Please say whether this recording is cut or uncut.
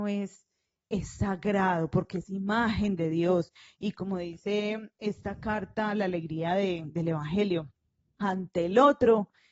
uncut